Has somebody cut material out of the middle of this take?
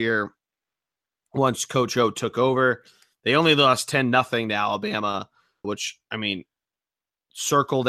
yes; 1 cut; at 5.6 s

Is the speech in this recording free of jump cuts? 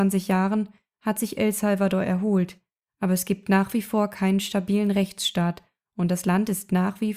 yes; 0 cuts

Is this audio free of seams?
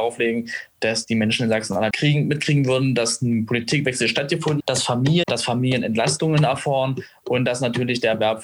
no; 3 cuts; at 1.9 s, 4.6 s, 5.2 s

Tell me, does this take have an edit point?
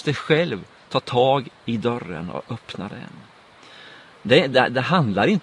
no; 0 cuts

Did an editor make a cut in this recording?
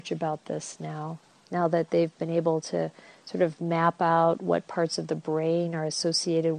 no; 0 cuts

